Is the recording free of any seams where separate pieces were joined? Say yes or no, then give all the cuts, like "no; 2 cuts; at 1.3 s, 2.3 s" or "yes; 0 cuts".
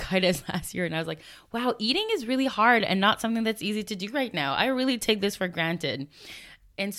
yes; 0 cuts